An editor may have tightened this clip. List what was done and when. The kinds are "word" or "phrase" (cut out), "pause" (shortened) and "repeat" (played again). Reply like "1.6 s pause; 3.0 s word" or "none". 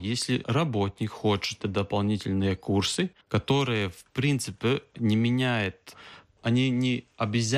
1.6 s word; 3.2 s pause